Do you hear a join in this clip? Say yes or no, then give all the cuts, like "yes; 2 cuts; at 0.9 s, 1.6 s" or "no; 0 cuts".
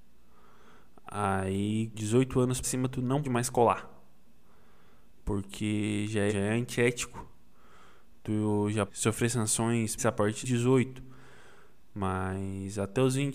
yes; 7 cuts; at 1.9 s, 2.6 s, 3.2 s, 6.3 s, 8.9 s, 10.0 s, 10.4 s